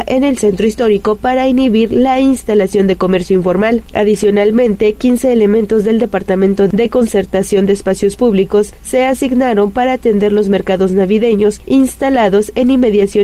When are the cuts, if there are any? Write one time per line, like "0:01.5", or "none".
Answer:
none